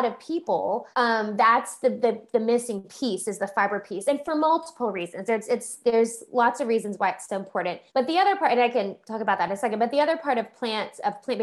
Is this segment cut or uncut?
cut